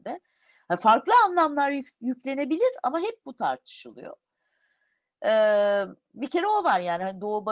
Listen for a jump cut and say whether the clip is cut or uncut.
uncut